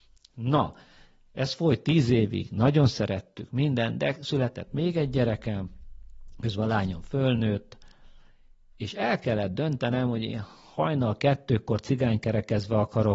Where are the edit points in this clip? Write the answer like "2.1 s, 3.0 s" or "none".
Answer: none

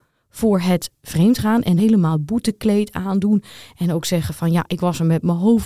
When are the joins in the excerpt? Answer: 1.8 s

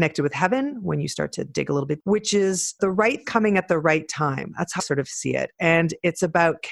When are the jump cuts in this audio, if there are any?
2.0 s, 2.8 s, 3.2 s, 4.8 s

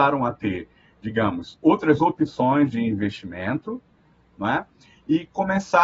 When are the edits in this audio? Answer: none

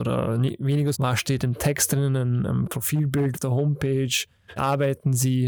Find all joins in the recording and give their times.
0.9 s, 2.6 s, 3.3 s, 4.6 s

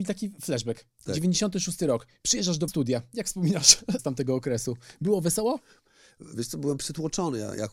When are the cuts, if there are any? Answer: 2.7 s, 4.0 s

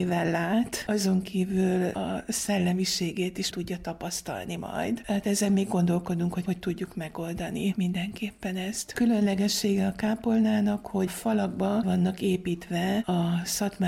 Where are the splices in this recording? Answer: 3.5 s, 11.1 s, 11.8 s

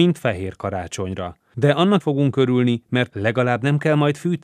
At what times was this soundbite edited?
2.0 s, 3.1 s

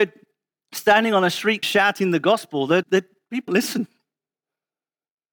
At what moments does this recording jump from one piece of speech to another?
1.6 s, 2.8 s, 3.5 s

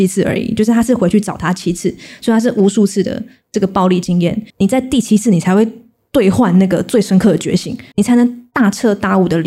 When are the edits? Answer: 4.5 s, 7.9 s

